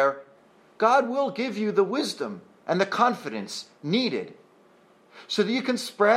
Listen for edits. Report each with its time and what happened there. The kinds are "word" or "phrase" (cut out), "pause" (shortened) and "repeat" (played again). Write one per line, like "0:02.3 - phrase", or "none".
none